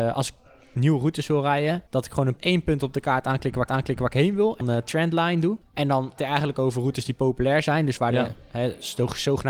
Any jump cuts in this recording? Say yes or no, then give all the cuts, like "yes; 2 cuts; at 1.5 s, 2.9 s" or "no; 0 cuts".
yes; 6 cuts; at 1.9 s, 2.4 s, 3.7 s, 4.6 s, 5.6 s, 6.2 s